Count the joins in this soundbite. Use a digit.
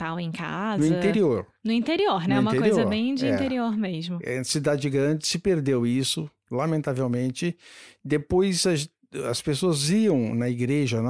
1